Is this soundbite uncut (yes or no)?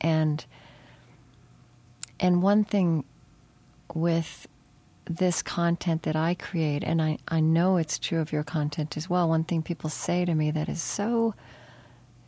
yes